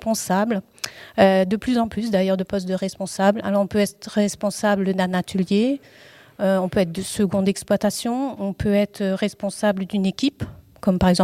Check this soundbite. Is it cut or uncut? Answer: uncut